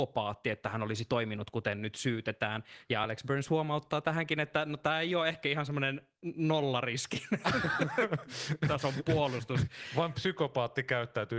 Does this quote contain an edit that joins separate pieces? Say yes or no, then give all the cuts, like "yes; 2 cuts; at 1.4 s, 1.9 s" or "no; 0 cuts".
no; 0 cuts